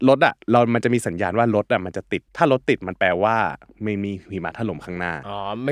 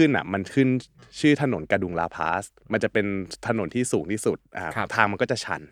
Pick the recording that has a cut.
first; 1 cut; at 2.3 s

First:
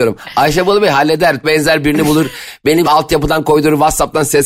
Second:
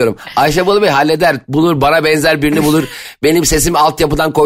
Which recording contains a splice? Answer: first; 2 cuts; at 1.4 s, 2.8 s

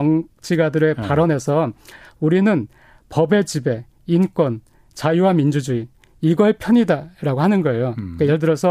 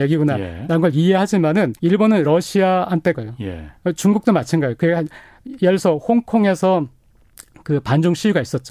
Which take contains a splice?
second; 2 cuts; at 1.8 s, 3.1 s

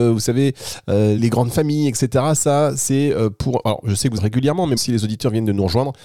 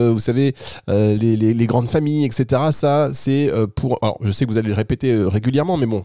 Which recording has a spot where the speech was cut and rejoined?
first; 3 cuts; at 1.2 s, 4.2 s, 4.8 s

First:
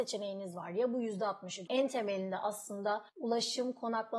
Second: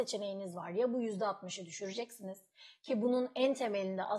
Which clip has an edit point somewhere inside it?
first; 2 cuts; at 1.7 s, 3.1 s

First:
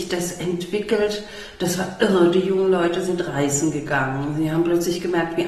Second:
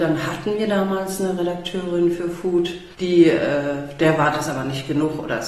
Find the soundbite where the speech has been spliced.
second; 1 cut; at 2.9 s

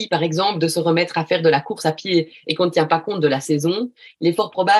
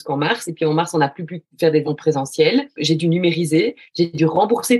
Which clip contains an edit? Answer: second; 2 cuts; at 1.8 s, 2.8 s

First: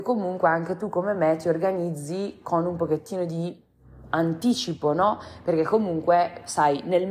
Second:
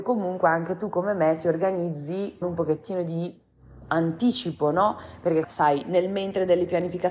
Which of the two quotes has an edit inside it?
second; 2 cuts; at 2.4 s, 5.4 s

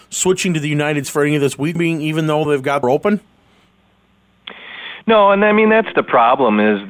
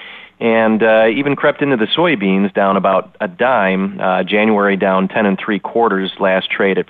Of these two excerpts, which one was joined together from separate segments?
first; 4 cuts; at 1.0 s, 1.8 s, 2.5 s, 2.8 s

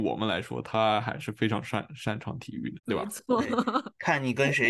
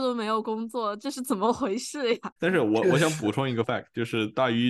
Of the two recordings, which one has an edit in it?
second; 1 cut; at 3.6 s

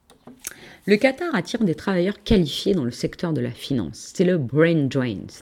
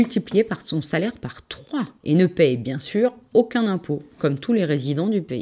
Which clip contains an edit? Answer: second; 1 cut; at 2.0 s

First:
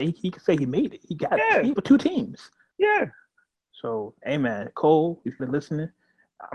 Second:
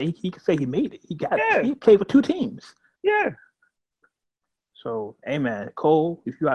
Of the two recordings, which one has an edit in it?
first; 3 cuts; at 1.8 s, 3.5 s, 5.4 s

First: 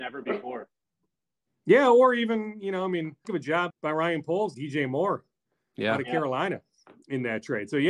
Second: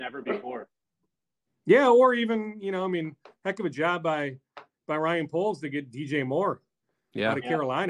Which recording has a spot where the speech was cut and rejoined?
first; 3 cuts; at 3.2 s, 3.7 s, 4.5 s

